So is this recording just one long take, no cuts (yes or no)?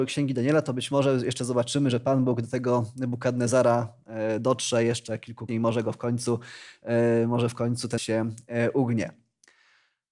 no